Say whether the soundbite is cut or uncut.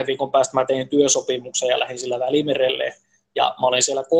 uncut